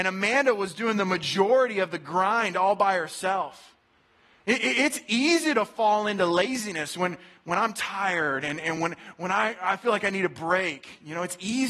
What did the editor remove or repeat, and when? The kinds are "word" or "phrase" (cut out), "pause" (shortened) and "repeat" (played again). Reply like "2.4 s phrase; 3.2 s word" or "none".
none

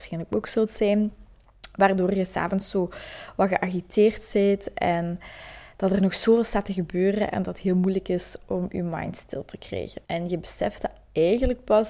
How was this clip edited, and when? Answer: 10.0 s pause

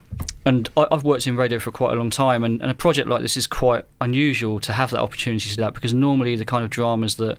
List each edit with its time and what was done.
5.6 s word

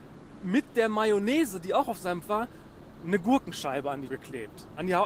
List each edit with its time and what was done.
2.2 s word; 4.1 s word

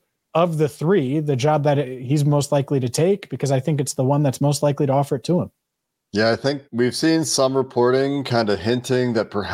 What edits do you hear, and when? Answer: 6.6 s pause

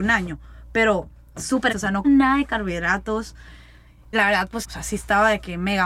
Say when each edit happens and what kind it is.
1.7 s word; 2.0 s word; 4.1 s word; 4.6 s word

